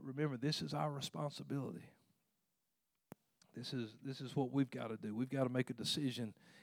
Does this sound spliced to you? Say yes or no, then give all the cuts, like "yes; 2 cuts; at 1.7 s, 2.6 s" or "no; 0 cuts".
no; 0 cuts